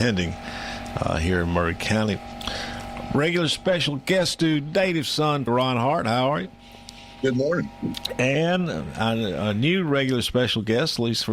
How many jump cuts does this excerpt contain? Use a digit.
1